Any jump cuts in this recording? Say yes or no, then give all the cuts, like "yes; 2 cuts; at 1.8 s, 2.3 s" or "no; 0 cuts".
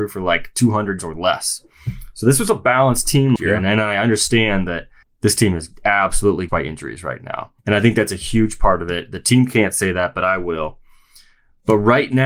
yes; 5 cuts; at 1.0 s, 3.4 s, 5.0 s, 6.5 s, 7.6 s